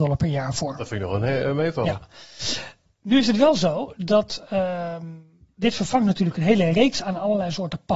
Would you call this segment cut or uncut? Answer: uncut